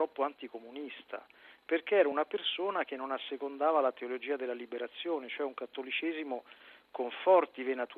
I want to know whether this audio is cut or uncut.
uncut